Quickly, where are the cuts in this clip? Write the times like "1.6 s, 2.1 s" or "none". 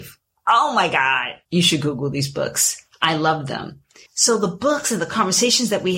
1.5 s, 4.1 s